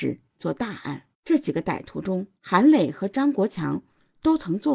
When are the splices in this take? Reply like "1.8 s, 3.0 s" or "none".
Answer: 1.1 s, 2.4 s